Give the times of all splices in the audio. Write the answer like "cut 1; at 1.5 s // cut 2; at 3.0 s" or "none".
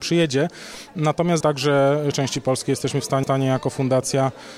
cut 1; at 1.4 s // cut 2; at 2.1 s // cut 3; at 3.2 s